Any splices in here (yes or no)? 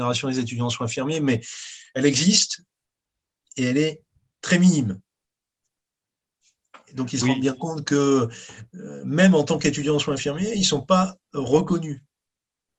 no